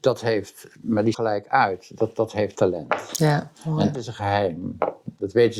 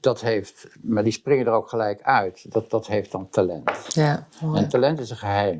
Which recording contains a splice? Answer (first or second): first